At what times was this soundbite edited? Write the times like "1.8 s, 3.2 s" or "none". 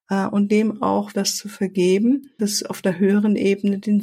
1.1 s, 2.4 s